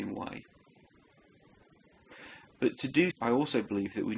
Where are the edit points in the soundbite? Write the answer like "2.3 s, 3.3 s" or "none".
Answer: 3.1 s